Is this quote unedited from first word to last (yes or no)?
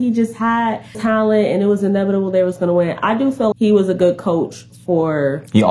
no